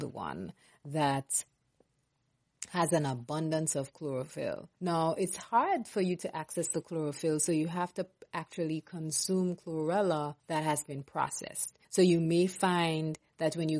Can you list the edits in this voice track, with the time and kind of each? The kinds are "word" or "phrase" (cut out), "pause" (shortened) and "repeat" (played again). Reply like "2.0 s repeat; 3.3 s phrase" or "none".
4.7 s pause; 10.4 s pause; 11.8 s pause